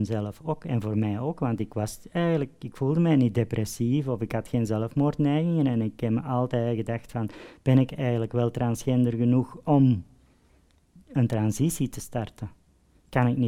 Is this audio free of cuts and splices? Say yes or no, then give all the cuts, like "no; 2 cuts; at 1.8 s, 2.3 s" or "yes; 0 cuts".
yes; 0 cuts